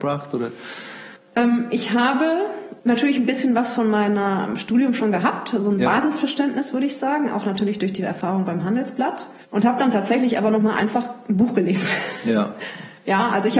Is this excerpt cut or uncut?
cut